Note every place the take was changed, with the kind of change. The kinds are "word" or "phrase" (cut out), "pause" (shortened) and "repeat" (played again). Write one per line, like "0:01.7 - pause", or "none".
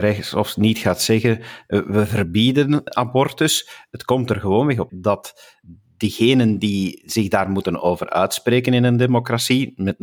0:02.9 - word
0:04.9 - word